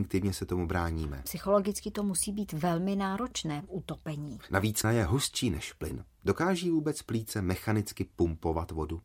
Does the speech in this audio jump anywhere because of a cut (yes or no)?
yes